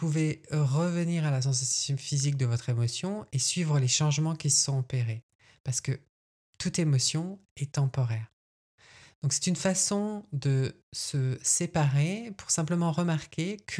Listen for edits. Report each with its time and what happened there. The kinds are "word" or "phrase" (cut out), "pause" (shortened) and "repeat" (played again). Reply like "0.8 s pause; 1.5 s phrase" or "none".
none